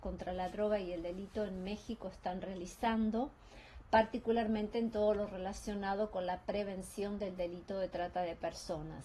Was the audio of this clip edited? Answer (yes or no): no